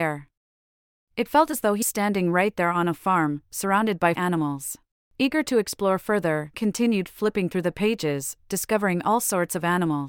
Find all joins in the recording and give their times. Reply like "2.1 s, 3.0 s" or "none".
1.8 s, 4.1 s, 4.9 s, 6.5 s